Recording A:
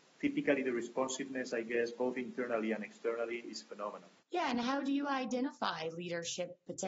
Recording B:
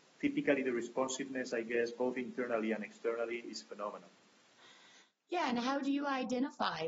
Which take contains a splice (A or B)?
A